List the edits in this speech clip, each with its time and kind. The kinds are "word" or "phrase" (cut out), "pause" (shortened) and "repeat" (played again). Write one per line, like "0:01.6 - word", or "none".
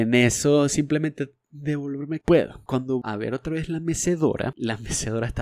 0:01.4 - word
0:02.2 - phrase
0:03.0 - word